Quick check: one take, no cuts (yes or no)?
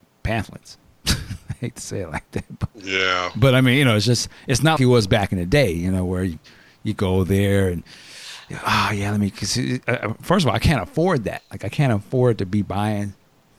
no